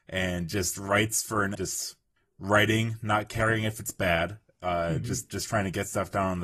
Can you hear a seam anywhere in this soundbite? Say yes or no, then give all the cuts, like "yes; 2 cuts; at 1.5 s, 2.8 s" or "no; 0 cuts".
yes; 2 cuts; at 1.5 s, 2.2 s